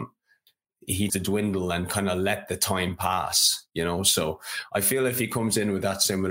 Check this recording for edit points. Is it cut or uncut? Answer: cut